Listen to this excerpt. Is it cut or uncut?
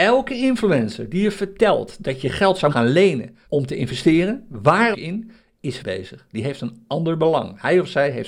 cut